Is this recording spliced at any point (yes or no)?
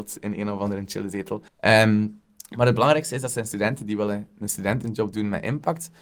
yes